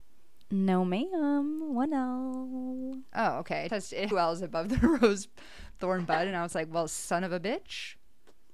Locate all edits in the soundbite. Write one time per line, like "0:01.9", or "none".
0:03.7
0:04.1